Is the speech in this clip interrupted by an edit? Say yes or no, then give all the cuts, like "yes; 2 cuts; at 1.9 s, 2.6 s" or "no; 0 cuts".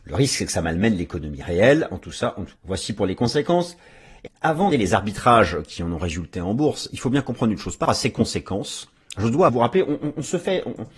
yes; 5 cuts; at 2.6 s, 4.3 s, 4.7 s, 7.9 s, 9.5 s